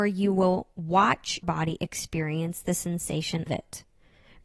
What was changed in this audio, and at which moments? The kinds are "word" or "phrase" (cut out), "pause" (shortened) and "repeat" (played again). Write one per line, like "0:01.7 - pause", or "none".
0:01.4 - word
0:03.5 - word